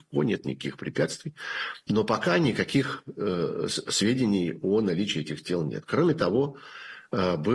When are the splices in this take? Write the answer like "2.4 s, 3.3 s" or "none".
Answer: none